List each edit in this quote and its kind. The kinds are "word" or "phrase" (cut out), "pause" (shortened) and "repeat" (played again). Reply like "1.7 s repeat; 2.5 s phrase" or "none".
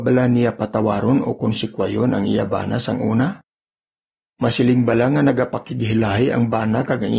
none